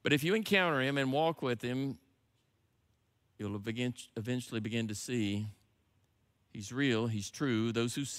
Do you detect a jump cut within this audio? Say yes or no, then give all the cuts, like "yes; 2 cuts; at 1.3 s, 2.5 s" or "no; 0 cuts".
no; 0 cuts